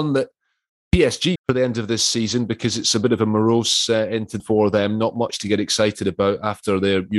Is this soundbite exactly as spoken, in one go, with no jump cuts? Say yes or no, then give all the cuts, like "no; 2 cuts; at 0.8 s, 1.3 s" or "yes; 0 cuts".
no; 2 cuts; at 1.4 s, 4.4 s